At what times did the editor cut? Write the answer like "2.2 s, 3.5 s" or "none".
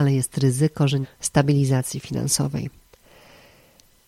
1.0 s